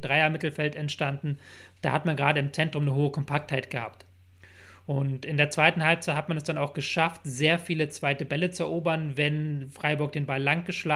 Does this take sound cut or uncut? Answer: uncut